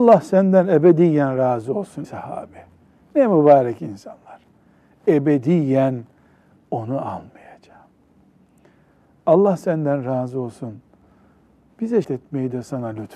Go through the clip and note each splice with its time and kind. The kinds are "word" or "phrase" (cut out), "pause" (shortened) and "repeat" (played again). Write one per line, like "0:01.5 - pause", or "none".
0:02.0 - word
0:12.0 - word

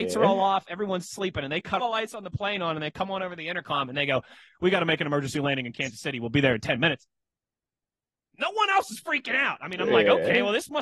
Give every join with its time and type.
0:01.8 - word

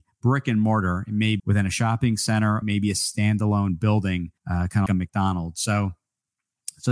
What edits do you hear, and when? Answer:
0:01.4 - word
0:02.6 - phrase
0:04.4 - pause
0:04.9 - word

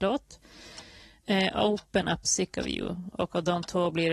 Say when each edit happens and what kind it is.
0:02.2 - phrase

